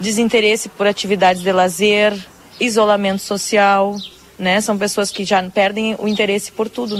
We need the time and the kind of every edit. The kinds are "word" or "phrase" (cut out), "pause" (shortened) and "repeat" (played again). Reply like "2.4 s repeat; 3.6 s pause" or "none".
none